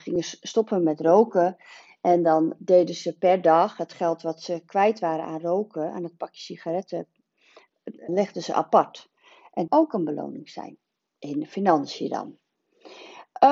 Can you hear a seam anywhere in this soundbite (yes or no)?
yes